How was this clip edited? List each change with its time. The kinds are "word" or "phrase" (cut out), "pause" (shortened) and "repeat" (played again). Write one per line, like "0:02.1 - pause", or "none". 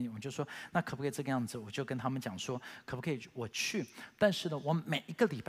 none